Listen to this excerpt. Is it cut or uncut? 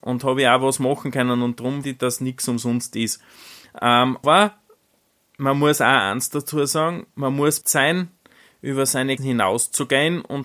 cut